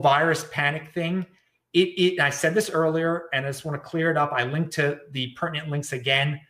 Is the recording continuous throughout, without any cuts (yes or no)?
yes